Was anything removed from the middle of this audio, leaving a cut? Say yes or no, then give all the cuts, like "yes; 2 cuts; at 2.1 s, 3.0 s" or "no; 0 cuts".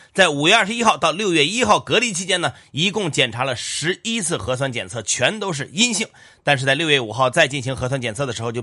no; 0 cuts